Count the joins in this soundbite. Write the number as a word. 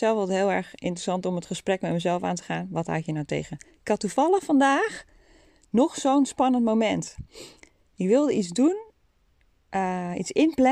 zero